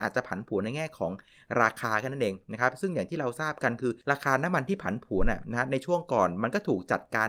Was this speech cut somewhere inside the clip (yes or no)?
yes